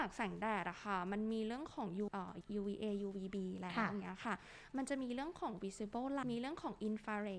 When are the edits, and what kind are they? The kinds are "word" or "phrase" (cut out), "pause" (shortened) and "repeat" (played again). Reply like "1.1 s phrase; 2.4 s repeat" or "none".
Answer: 2.1 s word; 2.4 s word; 6.2 s word